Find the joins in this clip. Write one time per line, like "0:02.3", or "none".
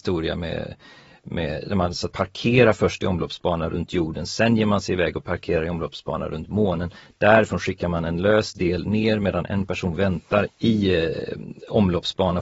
0:02.1
0:10.5